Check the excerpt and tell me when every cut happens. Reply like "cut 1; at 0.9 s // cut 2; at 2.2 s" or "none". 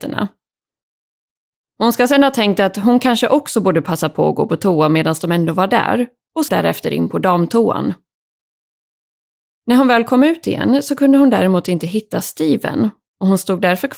cut 1; at 6.5 s